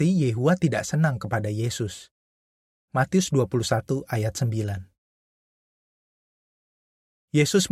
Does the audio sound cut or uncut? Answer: uncut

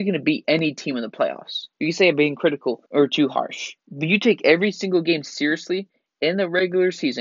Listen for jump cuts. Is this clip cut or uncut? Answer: cut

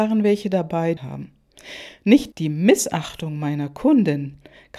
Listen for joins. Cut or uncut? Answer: cut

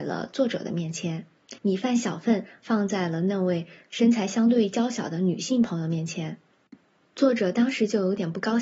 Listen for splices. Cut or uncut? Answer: cut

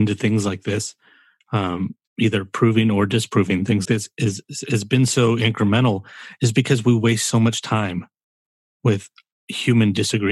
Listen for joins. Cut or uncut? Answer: cut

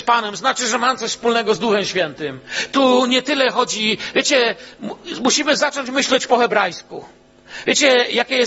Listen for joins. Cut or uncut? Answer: uncut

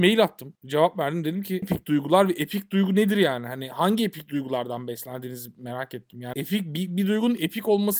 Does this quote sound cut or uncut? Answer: cut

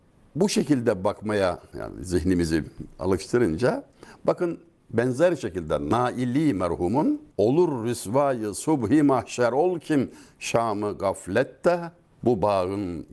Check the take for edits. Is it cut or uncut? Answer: cut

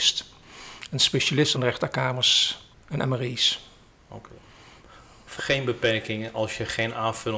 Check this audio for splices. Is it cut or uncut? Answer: cut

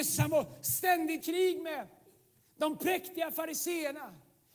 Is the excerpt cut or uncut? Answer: cut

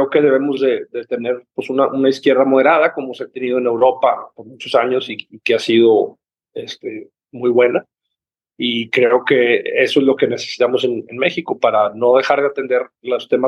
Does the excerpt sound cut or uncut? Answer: uncut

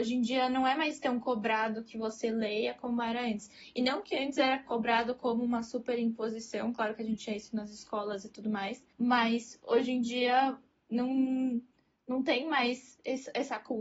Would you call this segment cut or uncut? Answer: cut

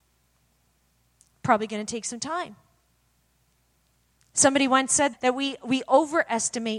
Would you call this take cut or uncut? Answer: cut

